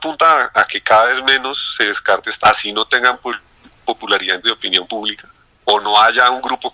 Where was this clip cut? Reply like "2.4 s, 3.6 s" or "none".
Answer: 2.4 s, 3.1 s, 4.4 s